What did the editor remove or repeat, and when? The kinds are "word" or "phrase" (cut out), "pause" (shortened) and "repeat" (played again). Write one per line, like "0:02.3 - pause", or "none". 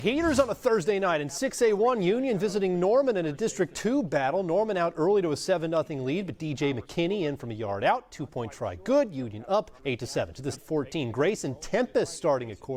0:09.8 - pause
0:10.5 - phrase